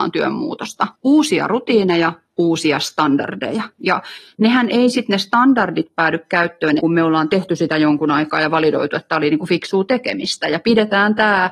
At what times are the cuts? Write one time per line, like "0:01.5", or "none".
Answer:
0:01.0
0:03.7
0:06.8

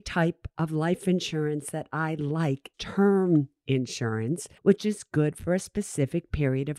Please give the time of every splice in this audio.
0:02.7
0:04.6

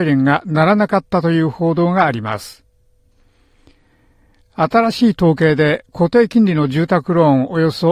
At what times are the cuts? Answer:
none

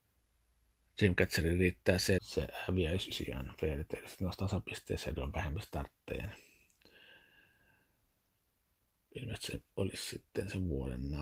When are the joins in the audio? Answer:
0:02.2
0:03.1
0:05.2
0:09.7

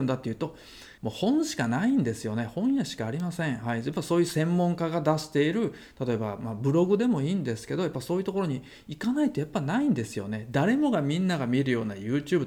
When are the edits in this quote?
0:00.9

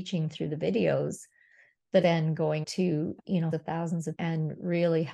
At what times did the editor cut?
0:02.0
0:02.6
0:03.5
0:04.1

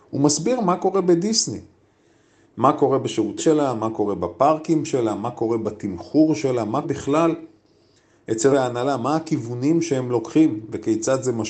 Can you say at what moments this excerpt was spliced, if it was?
0:03.4
0:06.8
0:08.5

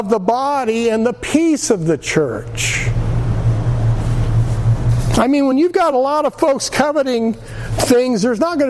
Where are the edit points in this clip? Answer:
none

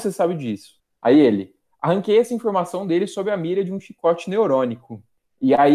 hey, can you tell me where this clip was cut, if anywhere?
none

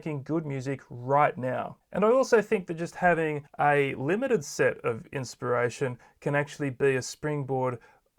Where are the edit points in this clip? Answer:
0:03.5

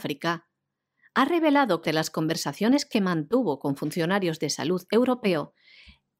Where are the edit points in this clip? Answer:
0:01.9

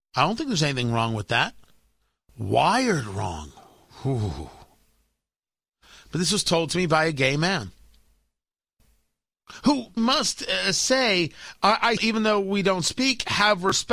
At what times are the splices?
0:10.0
0:12.0

